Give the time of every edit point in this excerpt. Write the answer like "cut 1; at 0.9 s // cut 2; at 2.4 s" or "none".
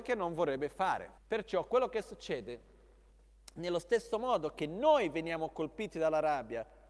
cut 1; at 1.2 s